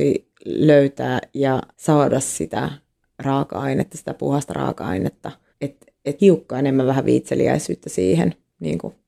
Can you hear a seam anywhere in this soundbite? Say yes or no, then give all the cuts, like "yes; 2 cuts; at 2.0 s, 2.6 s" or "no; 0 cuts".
yes; 3 cuts; at 1.7 s, 5.5 s, 6.2 s